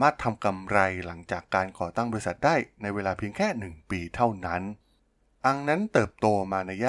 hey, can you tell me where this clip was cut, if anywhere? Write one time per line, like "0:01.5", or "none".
none